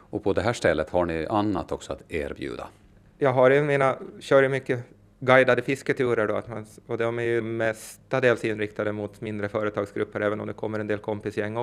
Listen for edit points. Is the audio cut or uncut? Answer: cut